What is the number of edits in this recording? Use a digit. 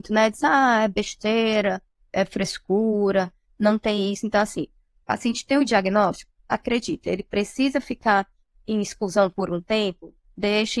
0